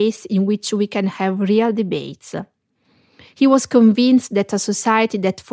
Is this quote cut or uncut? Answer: uncut